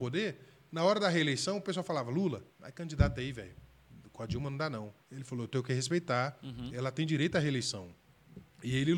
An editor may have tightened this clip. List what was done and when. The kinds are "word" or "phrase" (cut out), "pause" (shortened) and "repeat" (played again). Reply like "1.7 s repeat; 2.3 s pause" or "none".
2.5 s pause; 5.0 s pause